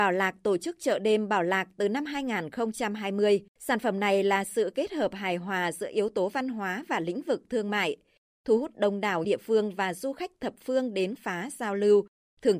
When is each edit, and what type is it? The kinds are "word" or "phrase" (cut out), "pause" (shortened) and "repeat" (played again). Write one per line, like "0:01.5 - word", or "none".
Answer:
0:03.5 - pause
0:09.2 - phrase
0:11.2 - word